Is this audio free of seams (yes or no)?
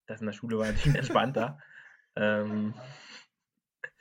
no